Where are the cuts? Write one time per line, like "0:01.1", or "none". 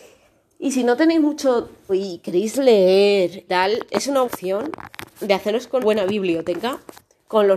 0:01.9
0:03.5
0:03.9
0:04.2
0:05.1
0:05.8